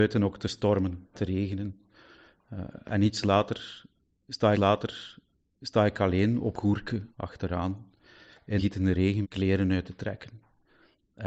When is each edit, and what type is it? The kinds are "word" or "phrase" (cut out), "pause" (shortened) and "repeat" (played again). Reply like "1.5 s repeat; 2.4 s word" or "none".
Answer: 1.1 s word; 4.5 s repeat; 6.5 s word; 7.1 s pause; 8.6 s word; 9.2 s word